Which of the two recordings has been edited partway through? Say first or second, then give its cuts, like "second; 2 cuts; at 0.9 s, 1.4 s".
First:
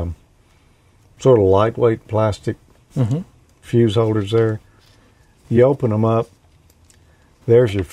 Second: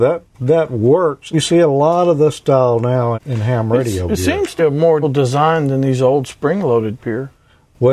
second; 5 cuts; at 1.3 s, 3.1 s, 4.6 s, 5.0 s, 7.0 s